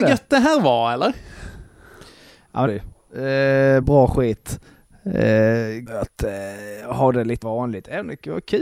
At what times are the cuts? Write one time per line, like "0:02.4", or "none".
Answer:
0:02.7
0:03.8
0:05.9
0:07.4